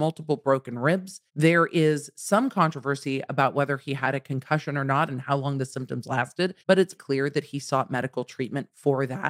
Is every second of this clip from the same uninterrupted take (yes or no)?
no